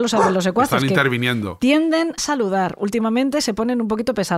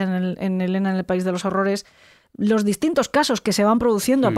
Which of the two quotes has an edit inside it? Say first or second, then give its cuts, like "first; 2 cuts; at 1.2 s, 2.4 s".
first; 1 cut; at 2.2 s